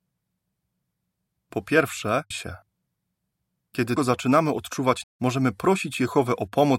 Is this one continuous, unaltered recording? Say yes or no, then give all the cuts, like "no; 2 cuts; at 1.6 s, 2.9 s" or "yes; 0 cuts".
no; 3 cuts; at 2.3 s, 4.0 s, 5.0 s